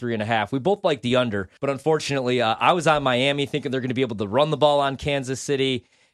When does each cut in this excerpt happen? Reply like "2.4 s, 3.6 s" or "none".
1.6 s